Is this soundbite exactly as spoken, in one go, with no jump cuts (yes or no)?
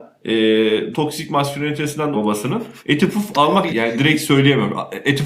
no